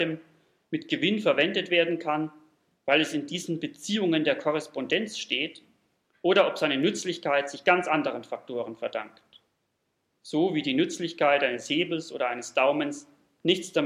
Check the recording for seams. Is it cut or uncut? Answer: uncut